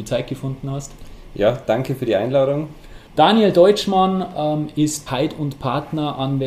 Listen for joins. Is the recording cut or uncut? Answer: cut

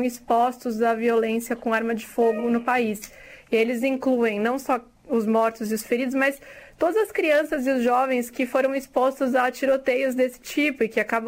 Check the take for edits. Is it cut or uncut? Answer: uncut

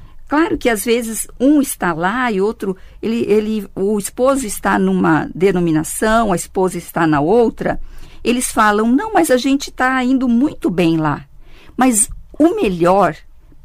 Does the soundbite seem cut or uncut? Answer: uncut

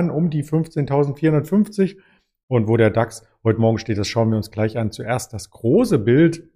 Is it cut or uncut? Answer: uncut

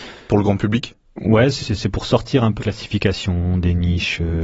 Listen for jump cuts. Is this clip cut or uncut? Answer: cut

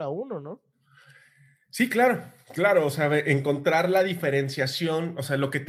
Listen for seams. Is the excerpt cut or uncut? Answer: uncut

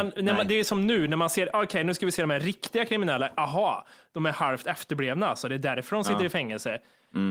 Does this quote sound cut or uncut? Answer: uncut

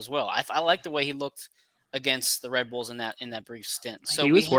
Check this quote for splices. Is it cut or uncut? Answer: uncut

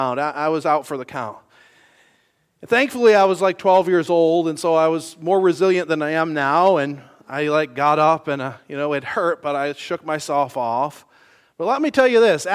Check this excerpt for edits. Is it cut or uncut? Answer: uncut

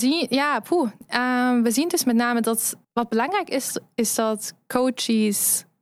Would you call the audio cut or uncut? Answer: cut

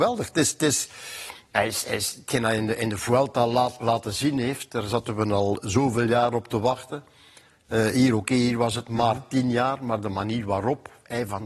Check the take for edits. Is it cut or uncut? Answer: uncut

